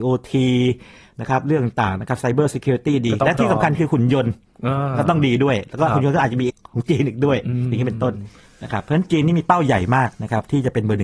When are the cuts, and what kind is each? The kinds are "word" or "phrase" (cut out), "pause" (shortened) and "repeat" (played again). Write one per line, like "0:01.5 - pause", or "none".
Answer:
0:06.5 - word